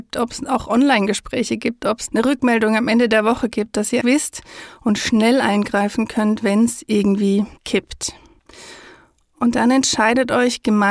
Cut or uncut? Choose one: cut